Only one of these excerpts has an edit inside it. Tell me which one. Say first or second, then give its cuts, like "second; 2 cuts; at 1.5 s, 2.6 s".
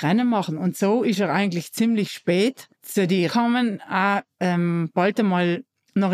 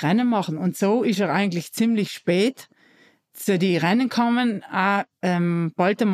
first; 2 cuts; at 2.7 s, 3.3 s